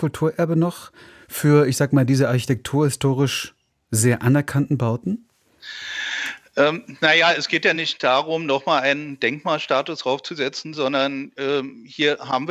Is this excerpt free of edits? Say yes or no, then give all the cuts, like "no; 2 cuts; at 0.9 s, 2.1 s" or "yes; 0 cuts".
yes; 0 cuts